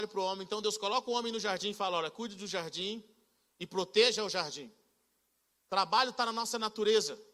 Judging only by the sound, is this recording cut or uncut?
uncut